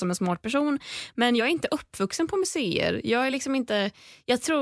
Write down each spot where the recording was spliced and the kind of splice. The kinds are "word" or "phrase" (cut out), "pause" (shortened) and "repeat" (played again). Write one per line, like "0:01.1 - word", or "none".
none